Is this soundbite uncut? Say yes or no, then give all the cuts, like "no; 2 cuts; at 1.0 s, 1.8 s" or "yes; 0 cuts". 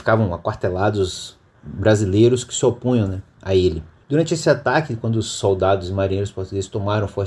yes; 0 cuts